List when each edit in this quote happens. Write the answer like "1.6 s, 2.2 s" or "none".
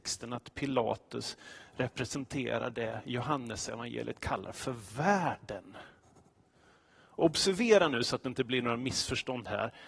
none